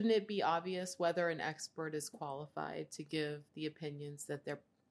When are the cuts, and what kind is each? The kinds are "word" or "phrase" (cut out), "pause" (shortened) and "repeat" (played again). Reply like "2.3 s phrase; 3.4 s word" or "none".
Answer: 3.5 s pause

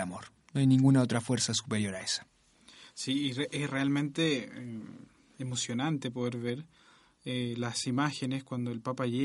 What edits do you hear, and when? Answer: none

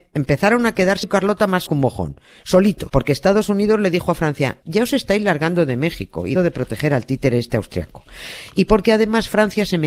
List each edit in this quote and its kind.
1.0 s word; 1.7 s word; 2.9 s word; 4.6 s word; 6.4 s word

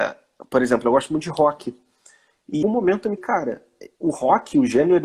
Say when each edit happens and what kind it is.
2.6 s word; 3.2 s word; 4.0 s word

